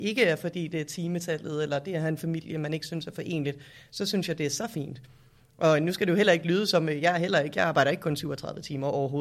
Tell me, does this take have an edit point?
no; 0 cuts

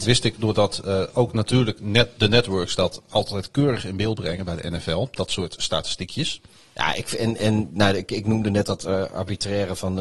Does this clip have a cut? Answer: no; 0 cuts

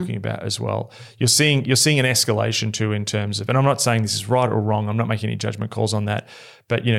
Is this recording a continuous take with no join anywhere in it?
yes; 0 cuts

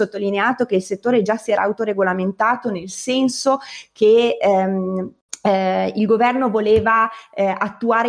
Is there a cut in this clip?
no; 0 cuts

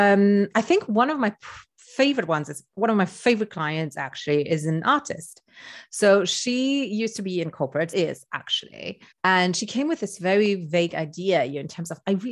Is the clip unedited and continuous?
no; 2 cuts; at 7.9 s, 9.1 s

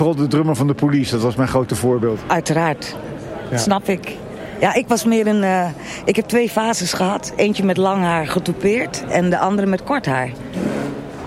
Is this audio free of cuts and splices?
yes; 0 cuts

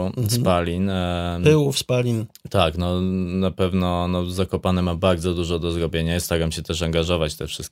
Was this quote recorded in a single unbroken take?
yes; 0 cuts

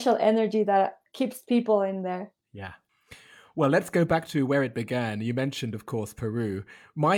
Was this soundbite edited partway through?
no; 0 cuts

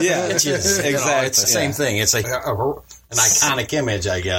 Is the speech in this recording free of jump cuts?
no; 2 cuts; at 1.4 s, 2.2 s

